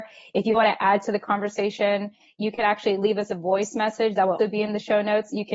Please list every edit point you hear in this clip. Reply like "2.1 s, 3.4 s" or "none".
4.4 s